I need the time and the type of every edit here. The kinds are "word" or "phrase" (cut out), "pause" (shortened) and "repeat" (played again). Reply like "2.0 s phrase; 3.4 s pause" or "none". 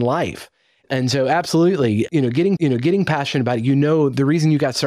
2.6 s repeat